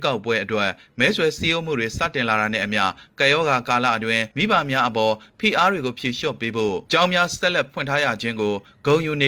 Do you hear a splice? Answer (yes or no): yes